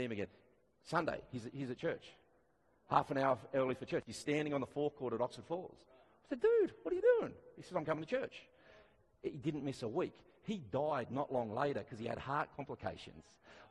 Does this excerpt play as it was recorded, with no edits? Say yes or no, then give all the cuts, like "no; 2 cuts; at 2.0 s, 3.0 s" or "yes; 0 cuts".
yes; 0 cuts